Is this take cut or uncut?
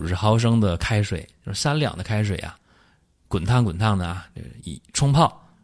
uncut